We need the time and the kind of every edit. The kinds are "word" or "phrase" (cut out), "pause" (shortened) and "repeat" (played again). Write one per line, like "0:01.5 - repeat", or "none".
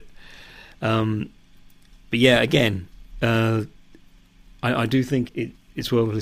0:05.3 - word